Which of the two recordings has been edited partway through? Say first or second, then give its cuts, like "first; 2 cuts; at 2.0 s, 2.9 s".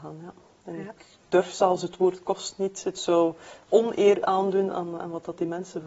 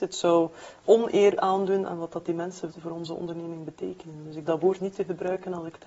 second; 4 cuts; at 1.9 s, 2.7 s, 4.5 s, 4.8 s